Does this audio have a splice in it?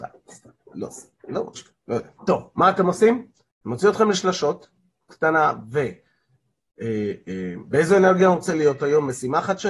yes; 3 cuts; at 1.5 s, 2.2 s, 5.1 s

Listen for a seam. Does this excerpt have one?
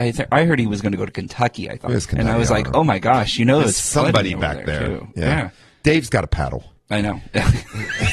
yes; 1 cut; at 1.9 s

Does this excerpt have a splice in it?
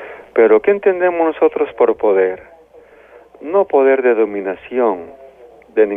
no; 0 cuts

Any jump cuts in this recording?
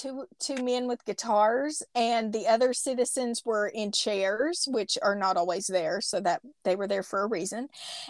no; 0 cuts

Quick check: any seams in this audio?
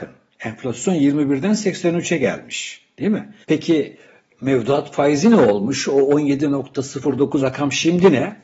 yes; 2 cuts; at 3.4 s, 7.4 s

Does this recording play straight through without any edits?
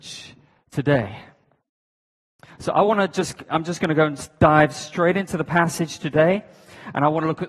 yes; 0 cuts

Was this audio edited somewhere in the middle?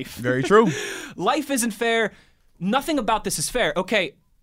no; 0 cuts

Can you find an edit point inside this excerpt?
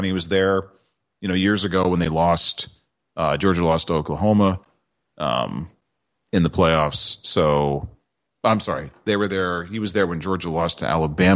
no; 0 cuts

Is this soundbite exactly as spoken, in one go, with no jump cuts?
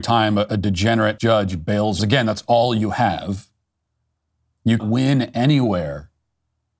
no; 3 cuts; at 1.2 s, 2.0 s, 4.8 s

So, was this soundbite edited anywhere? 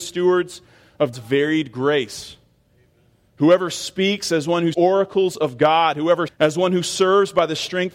yes; 3 cuts; at 1.1 s, 4.7 s, 6.3 s

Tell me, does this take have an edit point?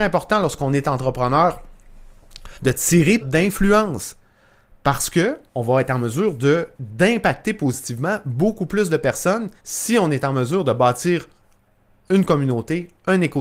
yes; 5 cuts; at 2.5 s, 3.2 s, 5.5 s, 6.7 s, 9.6 s

